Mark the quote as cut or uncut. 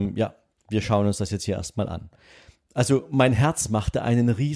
uncut